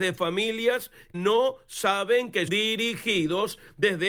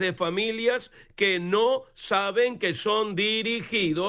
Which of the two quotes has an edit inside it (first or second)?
first